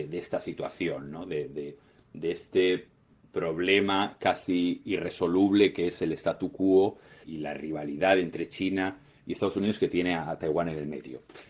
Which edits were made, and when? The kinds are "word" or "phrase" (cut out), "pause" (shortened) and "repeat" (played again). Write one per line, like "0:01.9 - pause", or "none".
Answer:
0:07.2 - word